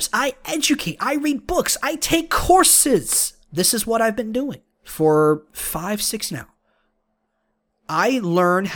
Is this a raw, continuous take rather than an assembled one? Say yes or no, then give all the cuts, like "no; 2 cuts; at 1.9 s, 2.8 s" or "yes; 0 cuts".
no; 3 cuts; at 3.4 s, 4.7 s, 6.3 s